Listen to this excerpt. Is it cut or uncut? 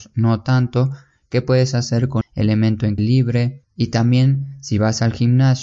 cut